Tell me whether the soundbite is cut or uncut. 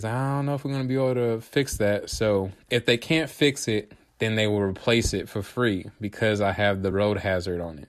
uncut